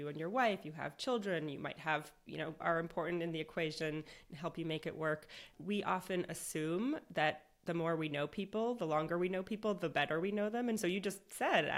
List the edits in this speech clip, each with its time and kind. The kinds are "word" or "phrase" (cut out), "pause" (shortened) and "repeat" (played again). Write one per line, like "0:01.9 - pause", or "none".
0:02.6 - phrase
0:05.5 - word